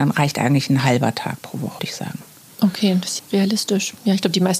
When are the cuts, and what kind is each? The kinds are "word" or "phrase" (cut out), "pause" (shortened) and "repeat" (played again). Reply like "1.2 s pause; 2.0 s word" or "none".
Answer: 1.8 s word; 3.2 s word